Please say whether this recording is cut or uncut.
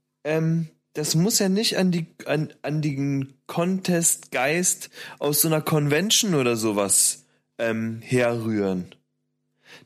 uncut